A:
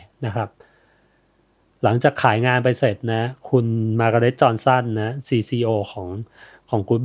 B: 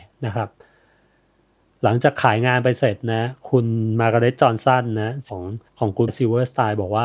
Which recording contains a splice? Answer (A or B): B